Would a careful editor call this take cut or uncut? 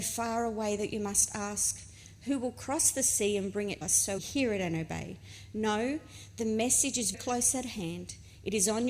cut